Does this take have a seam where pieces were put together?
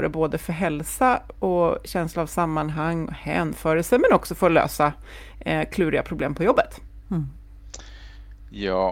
no; 0 cuts

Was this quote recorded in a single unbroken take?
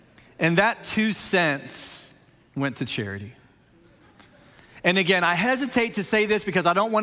yes; 0 cuts

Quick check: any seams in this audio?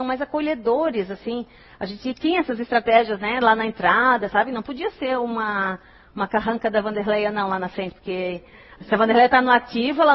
no; 0 cuts

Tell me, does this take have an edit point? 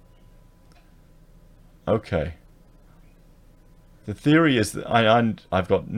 no; 0 cuts

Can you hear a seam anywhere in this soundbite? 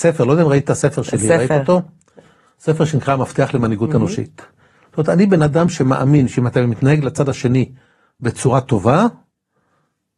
no; 0 cuts

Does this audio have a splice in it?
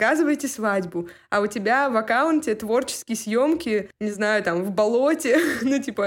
no; 0 cuts

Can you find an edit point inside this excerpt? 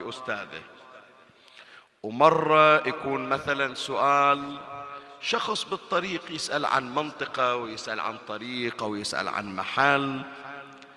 no; 0 cuts

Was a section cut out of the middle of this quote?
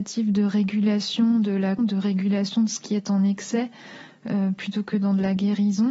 yes; 1 cut; at 1.8 s

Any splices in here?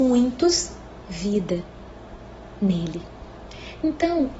yes; 1 cut; at 1.0 s

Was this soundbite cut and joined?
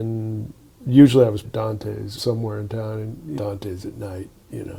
yes; 3 cuts; at 1.4 s, 2.2 s, 3.4 s

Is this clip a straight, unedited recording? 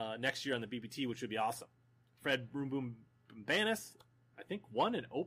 yes; 0 cuts

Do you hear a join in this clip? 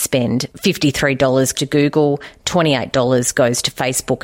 yes; 1 cut; at 1.5 s

